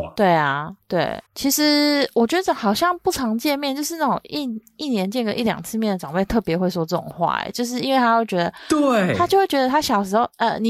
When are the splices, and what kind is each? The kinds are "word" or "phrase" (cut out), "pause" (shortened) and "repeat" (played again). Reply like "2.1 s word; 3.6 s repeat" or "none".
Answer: 1.3 s pause